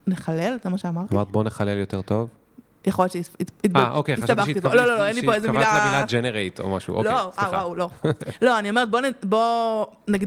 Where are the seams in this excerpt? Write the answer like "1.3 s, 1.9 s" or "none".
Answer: none

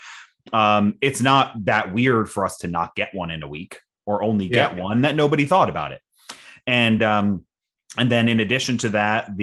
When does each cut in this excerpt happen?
none

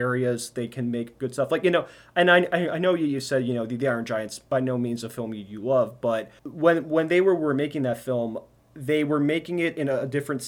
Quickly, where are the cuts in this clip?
none

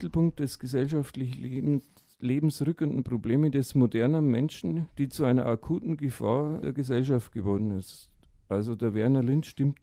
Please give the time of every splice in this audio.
6.6 s

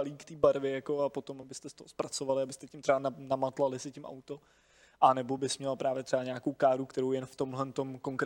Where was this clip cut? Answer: none

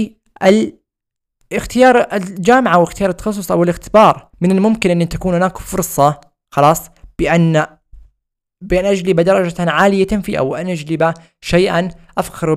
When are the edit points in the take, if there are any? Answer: 4.3 s, 10.3 s

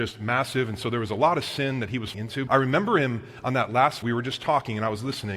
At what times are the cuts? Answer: 2.1 s, 2.5 s, 4.0 s

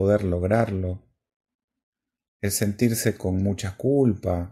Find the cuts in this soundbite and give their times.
none

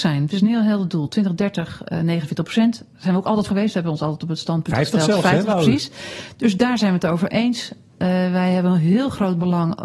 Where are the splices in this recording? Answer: 3.5 s

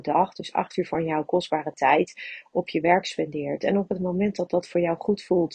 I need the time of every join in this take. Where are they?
none

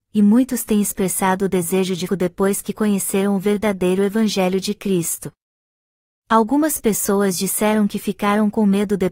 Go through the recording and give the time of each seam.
2.1 s

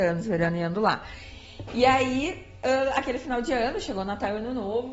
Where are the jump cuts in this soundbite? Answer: none

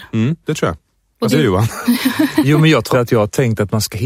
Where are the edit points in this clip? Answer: 1.3 s, 2.9 s

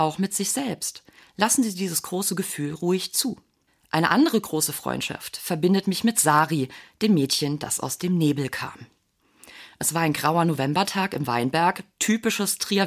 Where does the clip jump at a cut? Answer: 3.7 s

